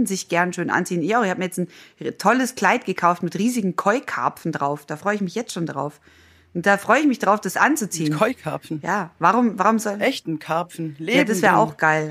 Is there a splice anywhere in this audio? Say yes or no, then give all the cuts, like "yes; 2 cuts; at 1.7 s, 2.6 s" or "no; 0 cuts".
no; 0 cuts